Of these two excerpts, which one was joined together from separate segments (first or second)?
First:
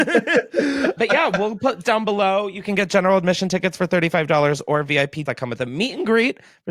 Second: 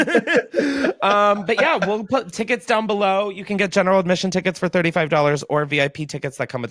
first